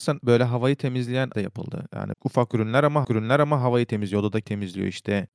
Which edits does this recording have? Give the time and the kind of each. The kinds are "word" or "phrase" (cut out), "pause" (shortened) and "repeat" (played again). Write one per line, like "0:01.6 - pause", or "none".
0:01.3 - word
0:02.1 - word
0:03.0 - repeat
0:04.4 - word